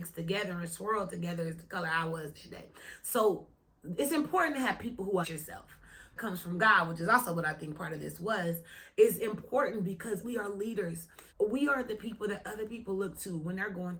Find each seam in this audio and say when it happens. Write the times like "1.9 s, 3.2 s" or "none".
5.2 s, 6.2 s, 10.2 s, 11.3 s